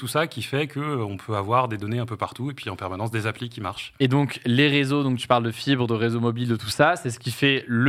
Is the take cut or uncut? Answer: uncut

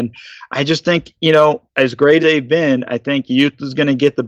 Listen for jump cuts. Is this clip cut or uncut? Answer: cut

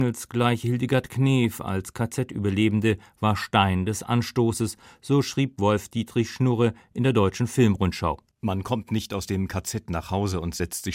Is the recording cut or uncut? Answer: uncut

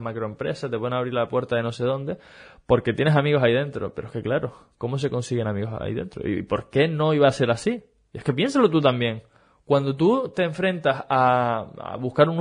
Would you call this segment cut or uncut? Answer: uncut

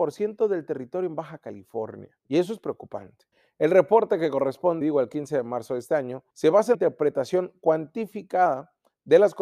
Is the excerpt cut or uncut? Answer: cut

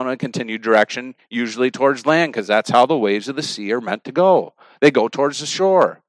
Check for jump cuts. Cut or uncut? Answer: uncut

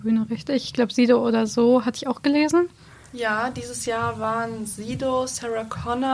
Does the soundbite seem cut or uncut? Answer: uncut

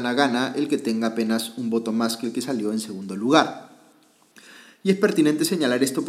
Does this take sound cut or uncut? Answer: uncut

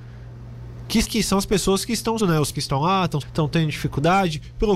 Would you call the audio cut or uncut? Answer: cut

